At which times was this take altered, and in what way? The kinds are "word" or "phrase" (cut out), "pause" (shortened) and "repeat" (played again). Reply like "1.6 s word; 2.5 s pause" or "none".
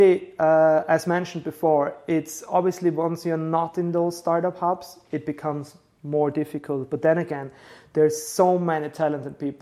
none